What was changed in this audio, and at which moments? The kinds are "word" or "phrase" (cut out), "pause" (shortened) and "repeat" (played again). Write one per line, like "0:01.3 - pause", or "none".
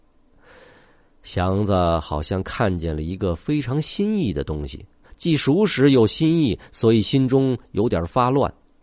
none